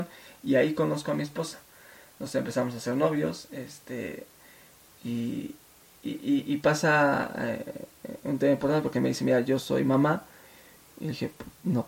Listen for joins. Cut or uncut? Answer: uncut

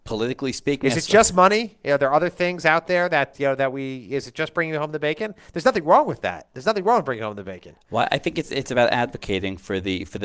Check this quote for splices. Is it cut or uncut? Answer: cut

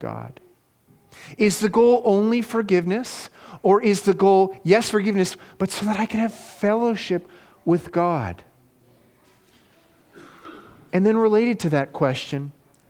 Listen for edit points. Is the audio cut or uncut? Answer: uncut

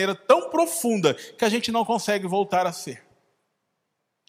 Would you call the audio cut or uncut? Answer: uncut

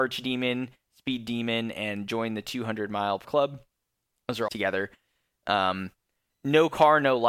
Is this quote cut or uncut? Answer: cut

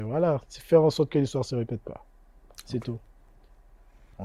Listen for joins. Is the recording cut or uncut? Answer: uncut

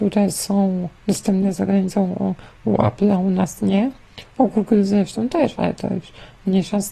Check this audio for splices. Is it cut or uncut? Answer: cut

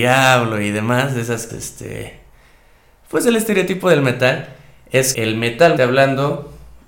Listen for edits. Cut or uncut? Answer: cut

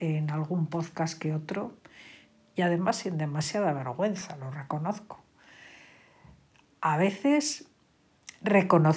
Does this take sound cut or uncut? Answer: uncut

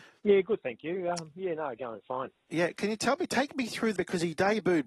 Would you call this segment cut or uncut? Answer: cut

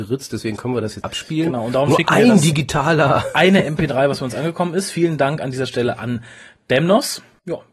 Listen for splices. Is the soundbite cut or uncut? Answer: cut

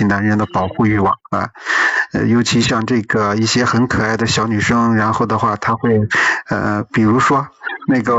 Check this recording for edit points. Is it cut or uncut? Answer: cut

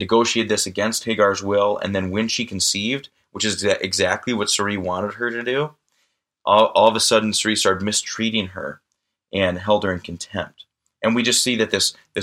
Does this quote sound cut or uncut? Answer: uncut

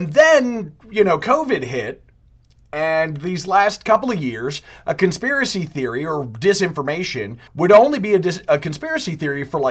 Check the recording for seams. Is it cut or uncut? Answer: cut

